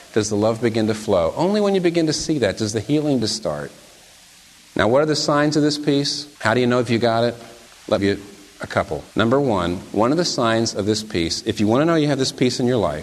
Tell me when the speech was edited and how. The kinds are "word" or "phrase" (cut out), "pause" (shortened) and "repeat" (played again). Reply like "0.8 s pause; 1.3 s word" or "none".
3.2 s word; 6.4 s pause; 8.0 s phrase; 9.1 s pause